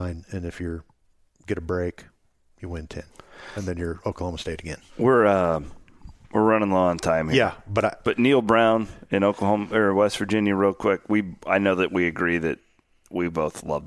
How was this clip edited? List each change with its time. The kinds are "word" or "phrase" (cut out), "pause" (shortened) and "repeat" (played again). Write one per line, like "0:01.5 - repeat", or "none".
0:04.9 - pause
0:08.0 - word